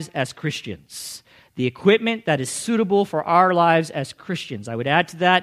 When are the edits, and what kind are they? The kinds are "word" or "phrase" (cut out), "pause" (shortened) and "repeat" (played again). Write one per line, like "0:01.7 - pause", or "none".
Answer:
none